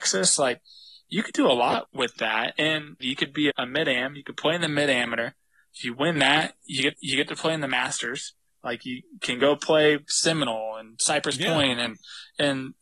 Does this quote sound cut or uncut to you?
cut